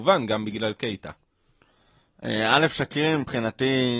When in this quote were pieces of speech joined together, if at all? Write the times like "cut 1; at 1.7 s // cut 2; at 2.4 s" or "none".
none